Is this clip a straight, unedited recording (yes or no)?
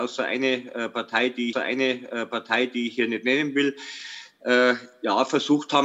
no